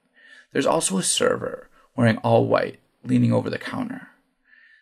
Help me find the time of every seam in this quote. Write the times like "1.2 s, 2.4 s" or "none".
none